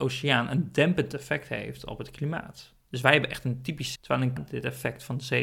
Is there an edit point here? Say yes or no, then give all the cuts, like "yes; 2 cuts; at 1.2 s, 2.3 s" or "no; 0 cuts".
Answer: yes; 2 cuts; at 4.0 s, 4.4 s